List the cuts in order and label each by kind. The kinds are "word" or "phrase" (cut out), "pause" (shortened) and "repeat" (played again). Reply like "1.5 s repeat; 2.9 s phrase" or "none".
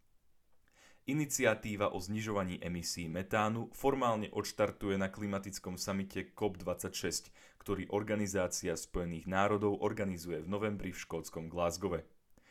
none